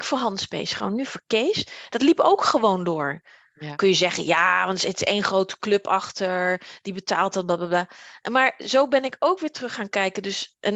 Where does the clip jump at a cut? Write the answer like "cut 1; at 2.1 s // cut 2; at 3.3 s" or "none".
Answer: none